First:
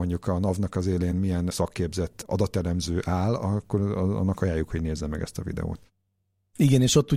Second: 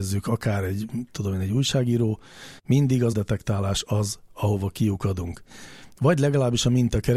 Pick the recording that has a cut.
second; 2 cuts; at 2.6 s, 3.1 s

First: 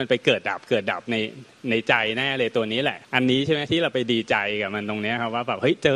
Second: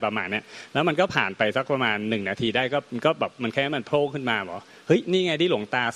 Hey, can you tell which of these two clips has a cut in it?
first; 1 cut; at 3.0 s

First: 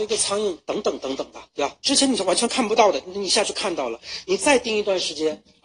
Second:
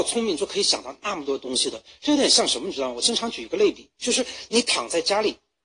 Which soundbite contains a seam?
first; 2 cuts; at 1.5 s, 1.8 s

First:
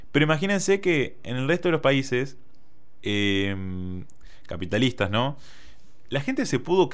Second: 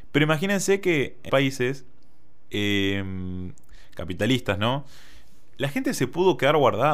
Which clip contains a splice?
second; 1 cut; at 1.3 s

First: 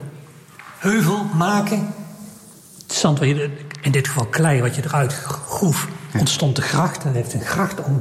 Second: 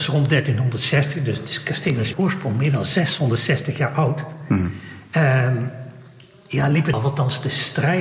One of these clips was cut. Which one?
second; 2 cuts; at 2.1 s, 6.9 s

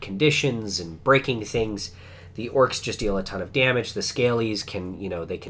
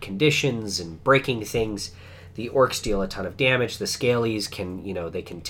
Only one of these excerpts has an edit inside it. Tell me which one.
second; 1 cut; at 2.8 s

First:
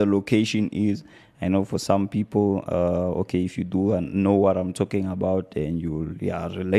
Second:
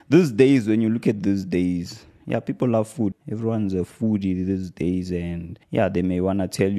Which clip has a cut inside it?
second; 2 cuts; at 3.1 s, 5.6 s

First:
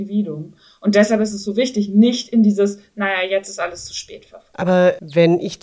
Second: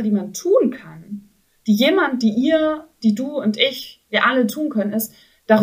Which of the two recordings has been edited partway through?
first; 1 cut; at 4.5 s

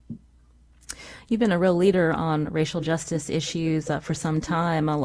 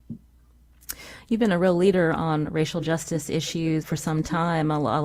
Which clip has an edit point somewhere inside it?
second; 1 cut; at 3.8 s

